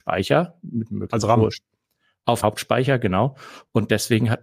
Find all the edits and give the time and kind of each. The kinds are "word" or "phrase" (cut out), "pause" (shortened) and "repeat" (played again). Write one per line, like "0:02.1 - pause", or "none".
0:01.2 - word
0:02.4 - word